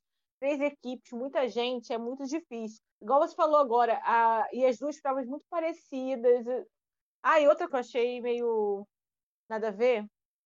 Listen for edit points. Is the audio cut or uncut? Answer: cut